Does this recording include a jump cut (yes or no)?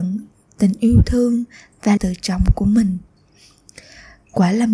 yes